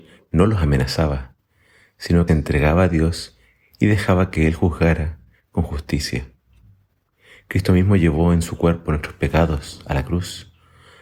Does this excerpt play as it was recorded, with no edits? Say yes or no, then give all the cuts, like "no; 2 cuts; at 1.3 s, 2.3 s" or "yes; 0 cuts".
no; 1 cut; at 2.3 s